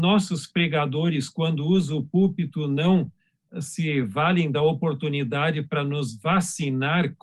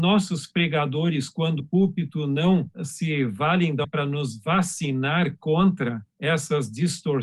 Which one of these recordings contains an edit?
second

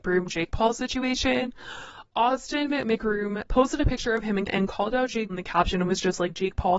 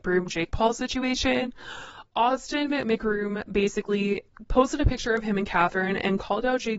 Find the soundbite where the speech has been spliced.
first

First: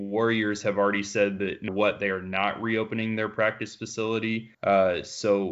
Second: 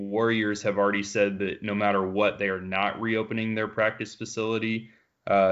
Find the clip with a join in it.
first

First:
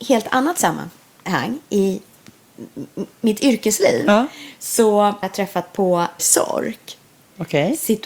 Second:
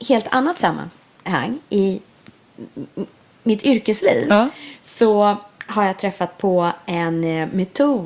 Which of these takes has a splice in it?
first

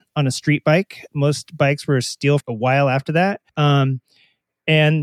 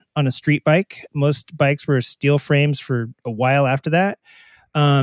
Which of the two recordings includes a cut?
first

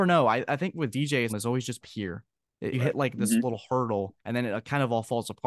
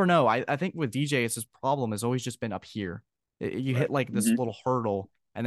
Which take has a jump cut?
first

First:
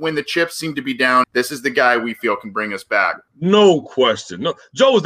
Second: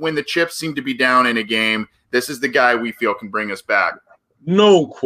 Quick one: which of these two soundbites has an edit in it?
first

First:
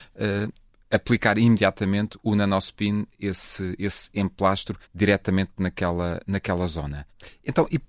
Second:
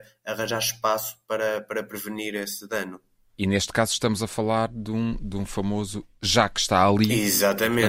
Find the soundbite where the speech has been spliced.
first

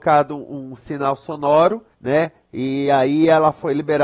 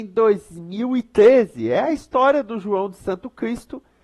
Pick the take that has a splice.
first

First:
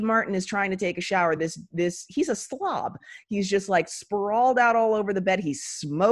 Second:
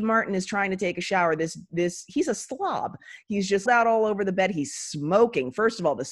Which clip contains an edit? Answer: second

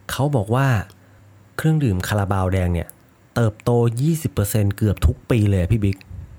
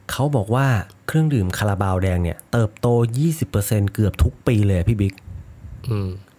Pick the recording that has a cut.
second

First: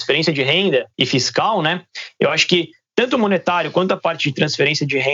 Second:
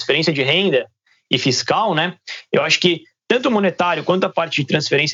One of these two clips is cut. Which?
first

